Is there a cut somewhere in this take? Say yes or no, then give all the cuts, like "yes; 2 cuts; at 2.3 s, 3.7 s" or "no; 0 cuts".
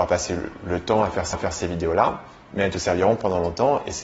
yes; 1 cut; at 1.3 s